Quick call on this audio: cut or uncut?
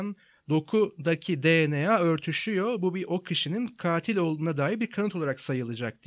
uncut